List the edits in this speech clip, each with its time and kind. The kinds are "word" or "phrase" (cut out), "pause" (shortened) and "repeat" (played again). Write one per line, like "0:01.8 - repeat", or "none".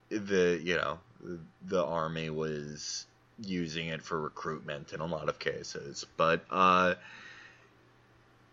0:03.2 - pause

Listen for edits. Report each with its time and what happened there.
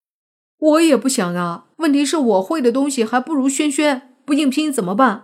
0:01.7 - pause

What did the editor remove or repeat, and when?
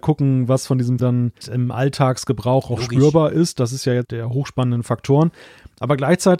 0:01.0 - word
0:01.4 - word
0:04.0 - word

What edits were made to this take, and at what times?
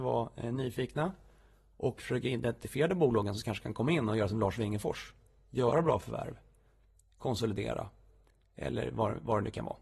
none

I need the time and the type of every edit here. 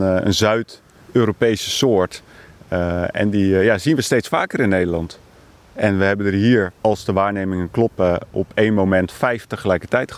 0:06.8 - pause

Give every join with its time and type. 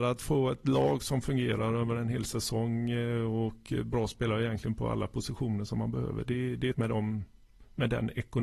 0:06.7 - word

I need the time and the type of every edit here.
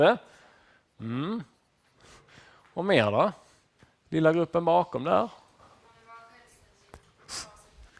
none

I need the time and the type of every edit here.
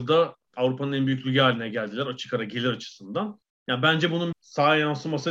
0:03.4 - pause
0:04.3 - word

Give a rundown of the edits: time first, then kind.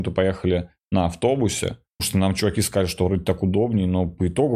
0:02.0 - word

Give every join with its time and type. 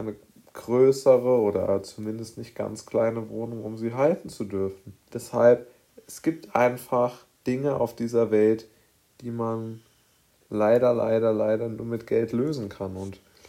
0:05.0 - pause
0:07.4 - pause

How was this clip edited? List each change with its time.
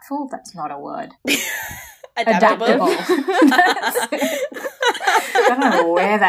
0:01.1 - pause

